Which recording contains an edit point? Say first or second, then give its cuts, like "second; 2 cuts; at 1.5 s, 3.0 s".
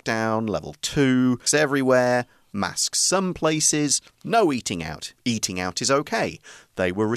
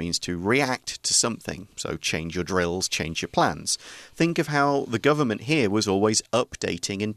first; 2 cuts; at 1.5 s, 5.2 s